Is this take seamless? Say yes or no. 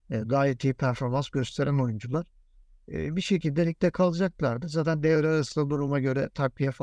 yes